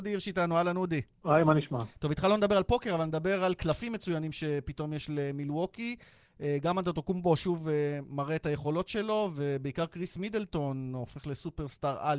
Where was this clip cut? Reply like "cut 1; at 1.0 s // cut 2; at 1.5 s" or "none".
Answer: cut 1; at 1.1 s